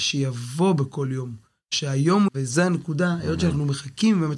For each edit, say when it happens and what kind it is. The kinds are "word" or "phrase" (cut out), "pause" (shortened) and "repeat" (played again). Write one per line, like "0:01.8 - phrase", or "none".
0:02.3 - word